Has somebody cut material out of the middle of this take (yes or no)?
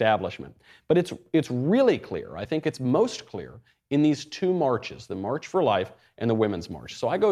no